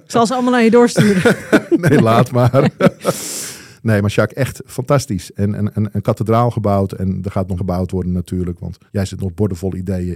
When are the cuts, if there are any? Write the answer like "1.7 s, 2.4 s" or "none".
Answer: 7.6 s, 8.9 s